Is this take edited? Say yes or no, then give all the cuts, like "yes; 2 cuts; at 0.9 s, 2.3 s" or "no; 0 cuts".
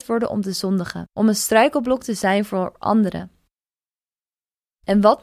yes; 1 cut; at 1.1 s